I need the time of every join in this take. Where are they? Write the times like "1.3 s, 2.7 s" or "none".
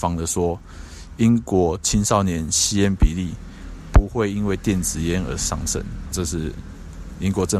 6.1 s